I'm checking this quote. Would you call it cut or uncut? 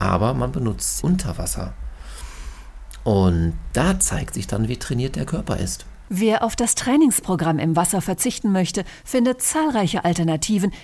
cut